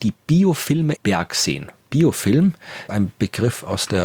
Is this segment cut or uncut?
cut